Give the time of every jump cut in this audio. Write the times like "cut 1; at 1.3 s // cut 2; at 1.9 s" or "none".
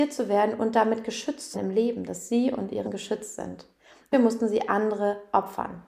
cut 1; at 1.5 s // cut 2; at 2.8 s // cut 3; at 4.1 s